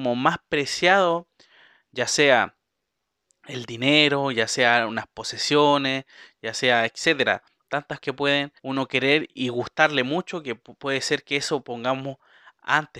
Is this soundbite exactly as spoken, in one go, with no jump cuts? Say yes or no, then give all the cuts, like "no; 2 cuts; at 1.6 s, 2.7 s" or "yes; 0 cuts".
no; 3 cuts; at 8.0 s, 8.6 s, 9.4 s